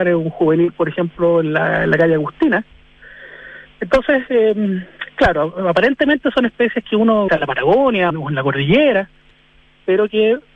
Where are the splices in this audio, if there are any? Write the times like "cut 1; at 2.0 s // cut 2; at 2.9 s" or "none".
cut 1; at 7.3 s // cut 2; at 8.1 s